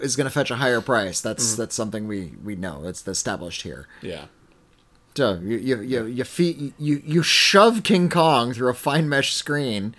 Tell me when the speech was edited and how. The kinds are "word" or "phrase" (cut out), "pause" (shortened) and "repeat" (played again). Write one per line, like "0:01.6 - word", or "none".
none

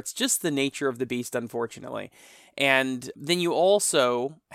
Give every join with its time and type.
0:03.1 - word

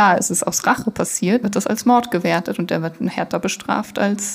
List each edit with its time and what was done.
0:01.4 - word

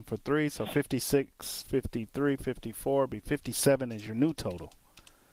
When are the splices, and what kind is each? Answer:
none

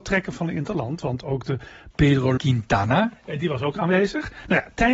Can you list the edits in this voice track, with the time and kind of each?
0:01.9 - word
0:02.4 - word

